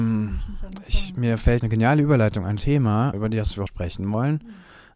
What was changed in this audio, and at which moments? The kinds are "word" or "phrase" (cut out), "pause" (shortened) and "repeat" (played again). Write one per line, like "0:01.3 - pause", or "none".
0:01.6 - word
0:02.6 - word
0:03.1 - word
0:03.7 - word